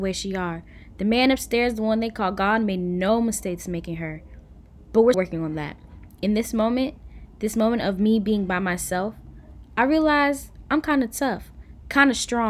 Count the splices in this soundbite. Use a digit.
1